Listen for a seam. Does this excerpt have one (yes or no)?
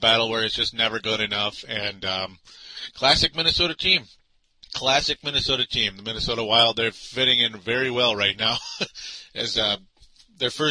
no